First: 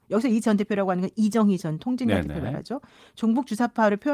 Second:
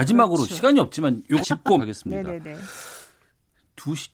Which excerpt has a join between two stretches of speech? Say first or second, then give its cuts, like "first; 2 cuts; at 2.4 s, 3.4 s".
second; 2 cuts; at 1.4 s, 1.8 s